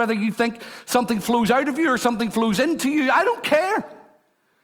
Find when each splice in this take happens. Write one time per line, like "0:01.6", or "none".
none